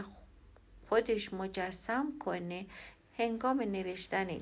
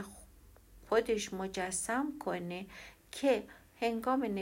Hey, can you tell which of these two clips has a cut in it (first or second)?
first